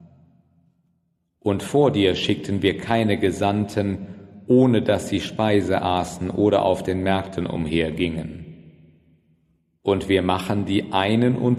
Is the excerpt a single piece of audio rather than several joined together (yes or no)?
yes